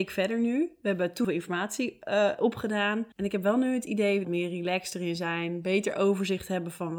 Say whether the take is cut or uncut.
cut